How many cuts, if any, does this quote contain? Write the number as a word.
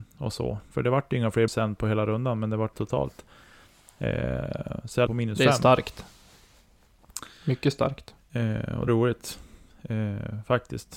four